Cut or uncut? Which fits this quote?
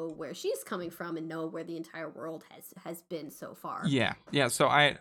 uncut